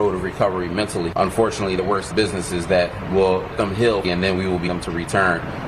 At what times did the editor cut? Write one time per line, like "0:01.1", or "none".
0:01.8
0:02.1
0:03.1
0:03.5
0:04.0
0:04.7